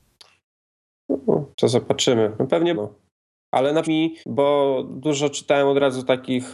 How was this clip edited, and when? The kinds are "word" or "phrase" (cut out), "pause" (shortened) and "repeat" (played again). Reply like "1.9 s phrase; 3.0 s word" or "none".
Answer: 1.5 s pause; 2.7 s word; 3.8 s word; 4.2 s pause